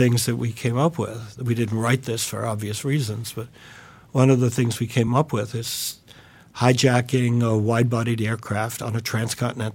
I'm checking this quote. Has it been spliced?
no; 0 cuts

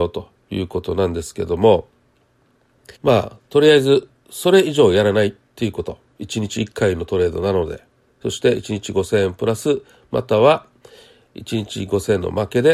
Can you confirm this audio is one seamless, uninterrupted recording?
no; 1 cut; at 3.0 s

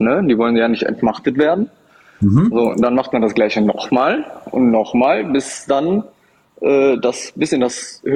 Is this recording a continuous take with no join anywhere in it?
yes; 0 cuts

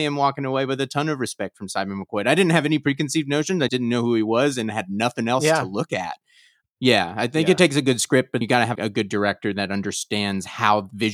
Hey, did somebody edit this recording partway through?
yes; 3 cuts; at 3.7 s, 8.4 s, 8.8 s

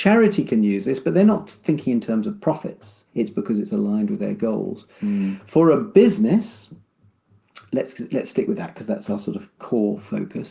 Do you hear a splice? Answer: yes; 1 cut; at 3.1 s

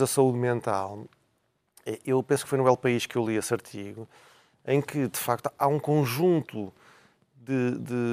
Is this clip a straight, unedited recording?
yes; 0 cuts

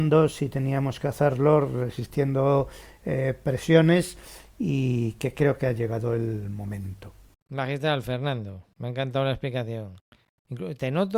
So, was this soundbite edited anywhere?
yes; 1 cut; at 7.3 s

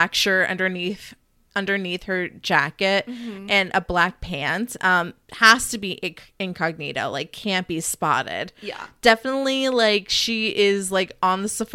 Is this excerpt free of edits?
yes; 0 cuts

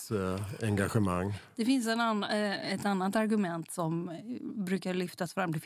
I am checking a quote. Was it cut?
no; 0 cuts

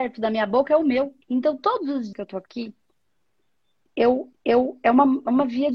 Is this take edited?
yes; 3 cuts; at 1.2 s, 2.1 s, 4.3 s

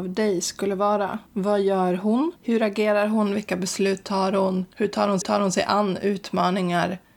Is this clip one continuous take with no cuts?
no; 4 cuts; at 1.3 s, 2.4 s, 4.7 s, 5.2 s

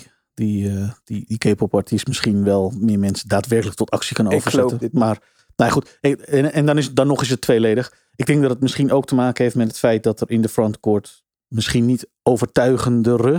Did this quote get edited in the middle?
no; 0 cuts

